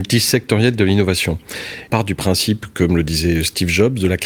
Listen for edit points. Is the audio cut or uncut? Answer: cut